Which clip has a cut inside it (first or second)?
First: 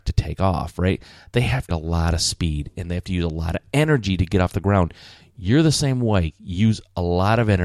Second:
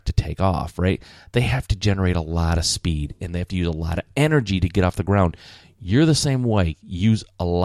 first